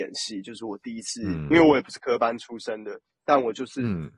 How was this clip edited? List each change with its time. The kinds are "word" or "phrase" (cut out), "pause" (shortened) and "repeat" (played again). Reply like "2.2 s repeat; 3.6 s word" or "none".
none